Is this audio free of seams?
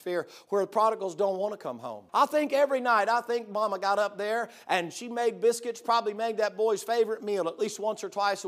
no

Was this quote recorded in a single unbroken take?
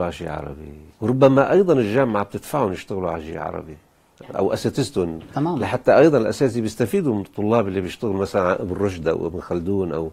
no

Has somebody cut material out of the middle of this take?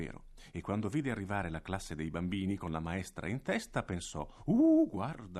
no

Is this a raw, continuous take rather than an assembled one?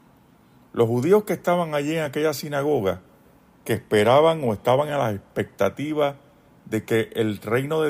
yes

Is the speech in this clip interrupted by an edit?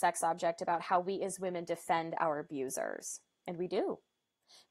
no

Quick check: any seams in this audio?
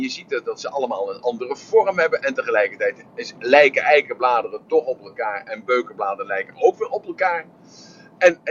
no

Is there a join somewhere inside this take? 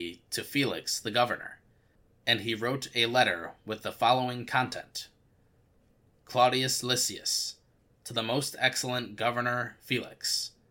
no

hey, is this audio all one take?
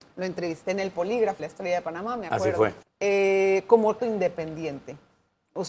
no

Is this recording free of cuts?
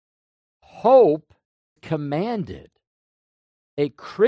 no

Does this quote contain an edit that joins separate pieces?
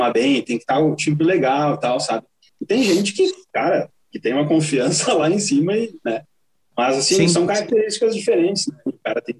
no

